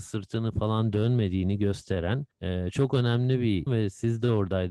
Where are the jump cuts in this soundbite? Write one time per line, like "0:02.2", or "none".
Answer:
0:02.3
0:03.7